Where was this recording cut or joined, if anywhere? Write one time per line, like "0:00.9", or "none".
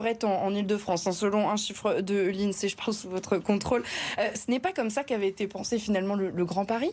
none